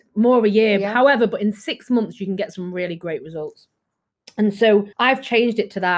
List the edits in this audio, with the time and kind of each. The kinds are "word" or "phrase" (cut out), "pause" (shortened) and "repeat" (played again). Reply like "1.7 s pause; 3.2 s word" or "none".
4.9 s pause